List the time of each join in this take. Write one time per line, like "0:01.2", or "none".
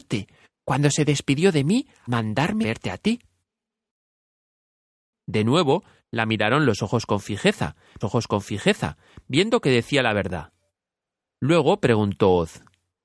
0:02.1
0:02.6
0:08.0